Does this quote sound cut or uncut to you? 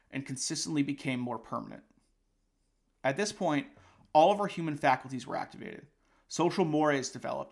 uncut